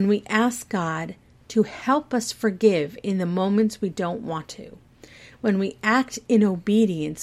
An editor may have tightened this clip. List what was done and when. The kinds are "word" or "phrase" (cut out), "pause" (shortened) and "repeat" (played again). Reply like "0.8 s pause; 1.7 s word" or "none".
none